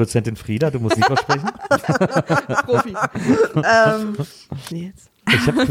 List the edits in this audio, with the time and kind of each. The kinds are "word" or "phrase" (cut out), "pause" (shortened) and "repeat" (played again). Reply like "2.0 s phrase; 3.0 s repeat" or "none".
1.0 s word; 4.7 s phrase